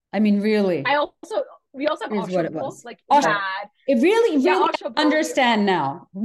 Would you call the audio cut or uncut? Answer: cut